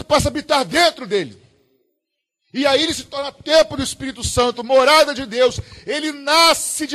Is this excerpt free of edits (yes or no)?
yes